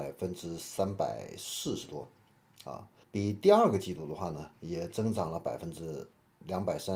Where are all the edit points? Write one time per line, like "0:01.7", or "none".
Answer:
0:03.0
0:04.6